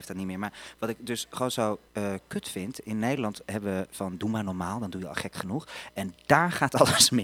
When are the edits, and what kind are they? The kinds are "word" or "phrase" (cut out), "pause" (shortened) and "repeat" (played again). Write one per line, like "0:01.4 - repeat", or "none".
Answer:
0:01.9 - pause